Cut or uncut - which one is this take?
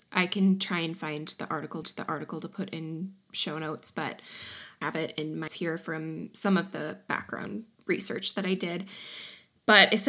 cut